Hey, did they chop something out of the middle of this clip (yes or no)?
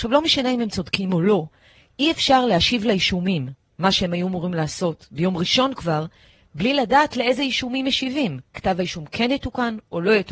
no